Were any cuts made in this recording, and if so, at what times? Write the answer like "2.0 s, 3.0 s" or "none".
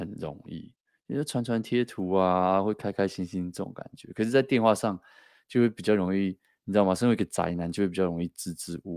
none